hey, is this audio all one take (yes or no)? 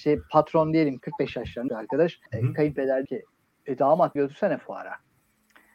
no